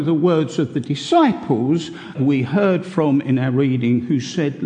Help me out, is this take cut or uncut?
cut